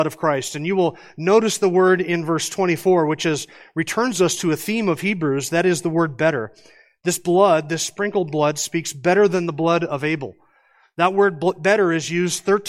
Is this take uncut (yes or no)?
yes